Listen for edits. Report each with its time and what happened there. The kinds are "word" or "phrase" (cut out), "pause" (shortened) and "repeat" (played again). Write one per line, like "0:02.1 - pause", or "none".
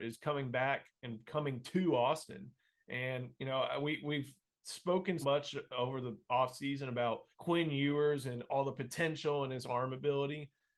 0:05.2 - word
0:07.3 - pause